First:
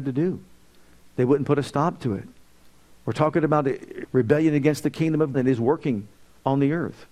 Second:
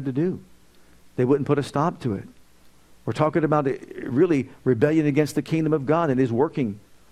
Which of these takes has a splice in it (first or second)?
first